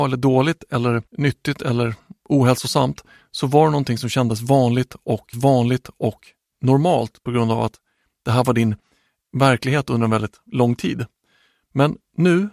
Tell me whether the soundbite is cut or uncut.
cut